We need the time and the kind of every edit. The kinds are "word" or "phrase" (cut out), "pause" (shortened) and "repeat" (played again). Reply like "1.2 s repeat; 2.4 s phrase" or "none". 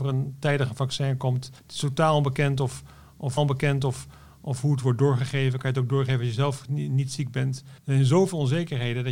1.6 s pause; 3.4 s repeat; 7.8 s pause